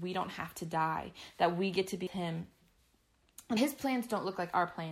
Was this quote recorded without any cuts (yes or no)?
no